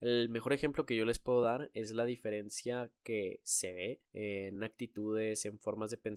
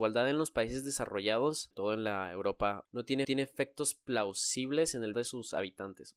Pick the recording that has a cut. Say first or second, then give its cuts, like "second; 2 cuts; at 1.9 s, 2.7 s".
second; 4 cuts; at 1.7 s, 2.8 s, 3.2 s, 5.1 s